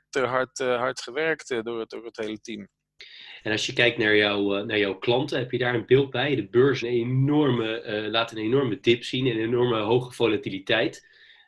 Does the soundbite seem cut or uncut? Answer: cut